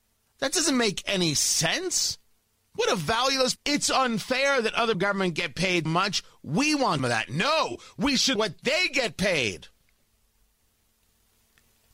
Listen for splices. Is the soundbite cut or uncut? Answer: cut